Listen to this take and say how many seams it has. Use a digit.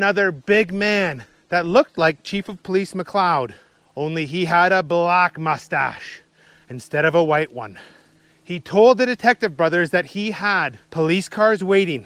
0